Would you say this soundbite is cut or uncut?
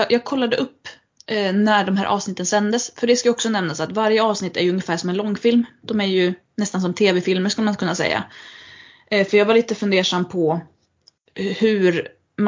uncut